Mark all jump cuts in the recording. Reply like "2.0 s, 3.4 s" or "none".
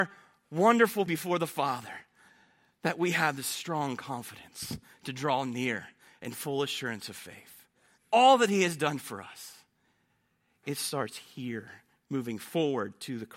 1.1 s, 8.0 s